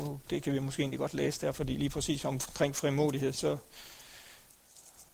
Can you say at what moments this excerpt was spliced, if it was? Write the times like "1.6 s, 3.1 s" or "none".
none